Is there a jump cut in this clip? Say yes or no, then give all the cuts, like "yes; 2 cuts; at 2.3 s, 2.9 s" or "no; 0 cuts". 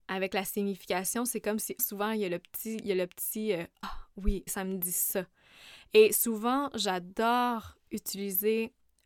yes; 3 cuts; at 1.8 s, 3.8 s, 4.5 s